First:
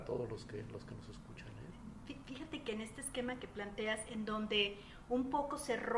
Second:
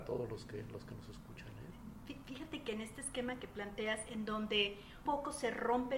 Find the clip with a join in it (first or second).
second